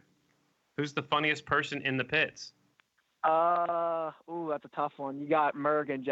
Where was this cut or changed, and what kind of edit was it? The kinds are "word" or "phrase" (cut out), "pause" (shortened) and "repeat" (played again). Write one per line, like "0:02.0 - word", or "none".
none